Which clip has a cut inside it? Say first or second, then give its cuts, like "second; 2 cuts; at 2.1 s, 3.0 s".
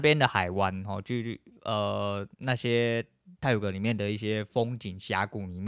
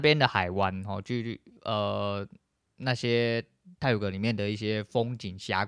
first; 1 cut; at 2.3 s